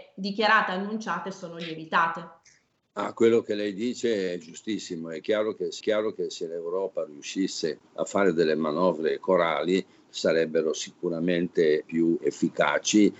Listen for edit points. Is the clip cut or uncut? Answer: cut